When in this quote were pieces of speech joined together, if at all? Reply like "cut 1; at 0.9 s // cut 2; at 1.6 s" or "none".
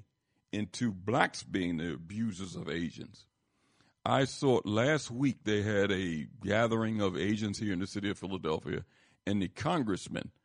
none